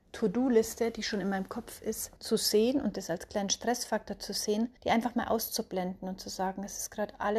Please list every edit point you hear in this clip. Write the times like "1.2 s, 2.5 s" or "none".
2.2 s, 4.8 s